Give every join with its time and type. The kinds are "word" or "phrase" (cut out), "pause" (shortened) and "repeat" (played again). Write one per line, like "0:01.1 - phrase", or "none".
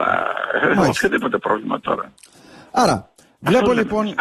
none